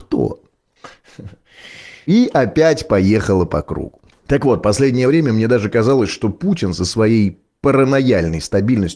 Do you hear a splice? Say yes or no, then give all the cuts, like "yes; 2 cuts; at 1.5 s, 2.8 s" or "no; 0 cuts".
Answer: no; 0 cuts